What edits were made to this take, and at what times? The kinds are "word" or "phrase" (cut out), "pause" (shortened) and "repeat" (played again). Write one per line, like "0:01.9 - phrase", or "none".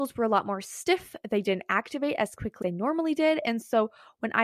0:02.6 - word